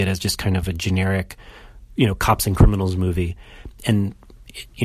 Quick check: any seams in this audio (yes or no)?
no